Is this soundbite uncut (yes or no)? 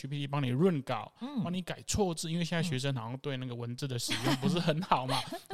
yes